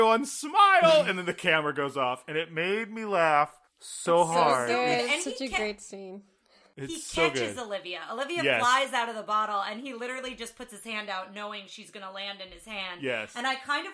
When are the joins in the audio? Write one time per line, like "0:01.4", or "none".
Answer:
0:03.7